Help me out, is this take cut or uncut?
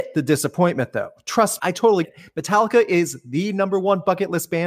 cut